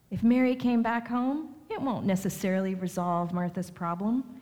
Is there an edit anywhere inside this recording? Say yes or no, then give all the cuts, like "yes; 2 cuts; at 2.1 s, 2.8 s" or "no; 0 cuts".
no; 0 cuts